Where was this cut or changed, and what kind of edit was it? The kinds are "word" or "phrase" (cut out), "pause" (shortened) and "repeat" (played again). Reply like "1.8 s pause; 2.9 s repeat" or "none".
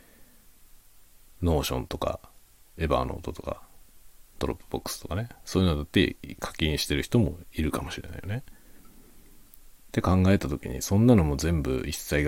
none